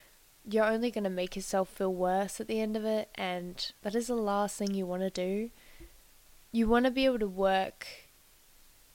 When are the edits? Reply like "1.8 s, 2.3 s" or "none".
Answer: 3.8 s